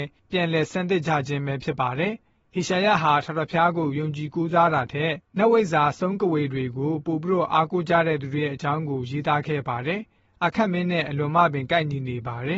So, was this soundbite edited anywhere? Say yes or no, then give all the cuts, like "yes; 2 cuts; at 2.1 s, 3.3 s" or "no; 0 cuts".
no; 0 cuts